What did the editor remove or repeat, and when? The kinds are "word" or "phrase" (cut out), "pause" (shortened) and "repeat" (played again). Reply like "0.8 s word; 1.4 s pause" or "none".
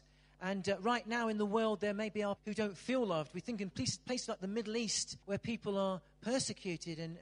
2.4 s word; 5.2 s pause

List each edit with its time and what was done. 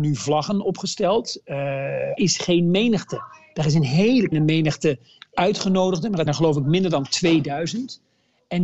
2.2 s phrase; 4.3 s word; 6.3 s word

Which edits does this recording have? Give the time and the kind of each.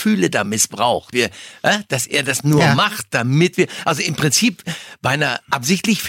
1.1 s word

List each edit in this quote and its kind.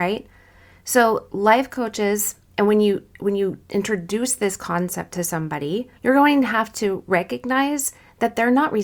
2.4 s pause; 6.0 s pause

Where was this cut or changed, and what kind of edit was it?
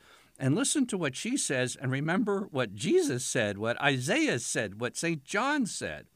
none

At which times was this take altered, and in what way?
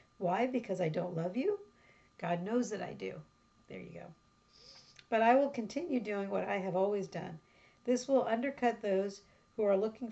none

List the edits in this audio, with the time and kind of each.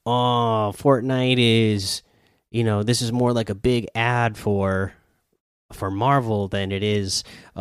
none

